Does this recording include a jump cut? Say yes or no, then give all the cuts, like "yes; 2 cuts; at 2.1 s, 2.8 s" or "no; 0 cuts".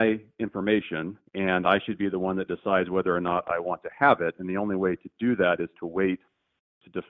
yes; 1 cut; at 1.3 s